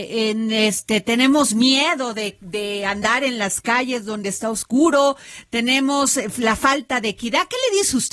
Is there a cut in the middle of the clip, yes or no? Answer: no